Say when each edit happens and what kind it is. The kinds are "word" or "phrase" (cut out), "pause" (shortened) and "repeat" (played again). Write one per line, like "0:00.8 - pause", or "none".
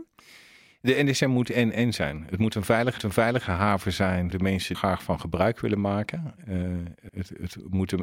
0:03.0 - repeat
0:04.3 - word
0:04.7 - phrase
0:07.1 - word

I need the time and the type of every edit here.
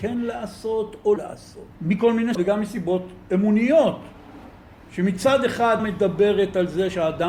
0:01.2 - word
0:01.7 - pause
0:02.3 - word
0:04.7 - pause
0:05.8 - word

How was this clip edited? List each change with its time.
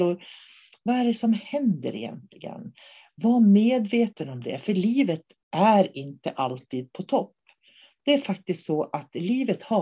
none

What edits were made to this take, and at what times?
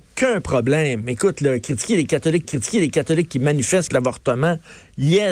0:02.4 - repeat
0:03.9 - word

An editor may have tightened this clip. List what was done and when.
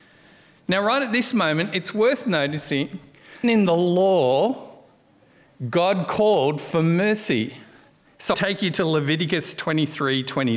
0:03.4 - word
0:08.3 - phrase

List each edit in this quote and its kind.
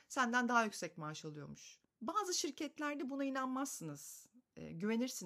0:01.8 - pause

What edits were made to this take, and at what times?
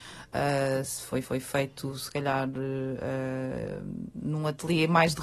0:01.2 - repeat

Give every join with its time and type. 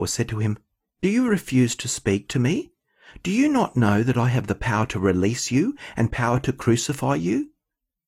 none

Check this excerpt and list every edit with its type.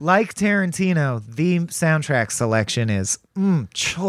none

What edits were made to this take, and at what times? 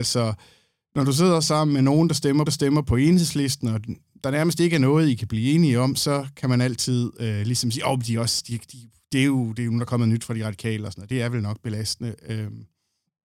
0:02.5 - repeat

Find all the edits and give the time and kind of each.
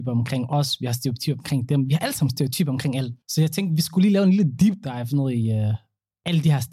0:03.2 - pause

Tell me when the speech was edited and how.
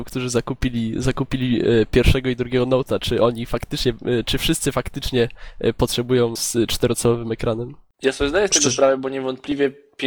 0:06.4 - word

